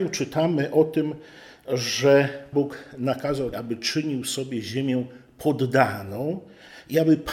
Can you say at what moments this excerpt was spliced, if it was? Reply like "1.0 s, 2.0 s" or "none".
2.5 s, 3.5 s